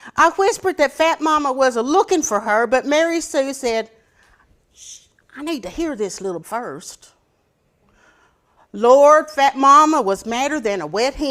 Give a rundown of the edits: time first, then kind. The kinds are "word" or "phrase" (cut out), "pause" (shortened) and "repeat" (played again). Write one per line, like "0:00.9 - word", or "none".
0:06.4 - word